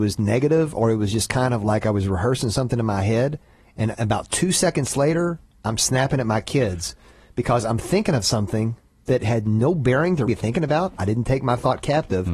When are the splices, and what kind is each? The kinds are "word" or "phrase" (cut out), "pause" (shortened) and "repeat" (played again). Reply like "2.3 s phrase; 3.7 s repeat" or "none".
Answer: 10.3 s word